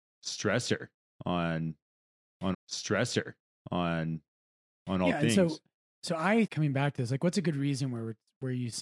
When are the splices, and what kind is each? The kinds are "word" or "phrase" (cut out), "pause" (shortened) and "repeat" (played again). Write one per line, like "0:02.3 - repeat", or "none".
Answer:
0:02.5 - repeat
0:06.5 - word